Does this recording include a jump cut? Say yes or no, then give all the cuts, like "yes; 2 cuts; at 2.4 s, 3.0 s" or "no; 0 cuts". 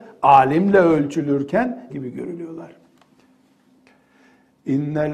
yes; 1 cut; at 1.9 s